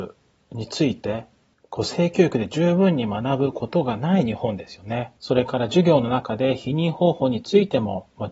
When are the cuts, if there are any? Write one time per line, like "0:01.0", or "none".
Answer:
0:01.5
0:05.2